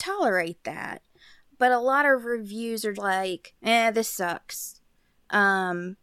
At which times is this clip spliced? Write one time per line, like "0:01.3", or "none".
0:02.9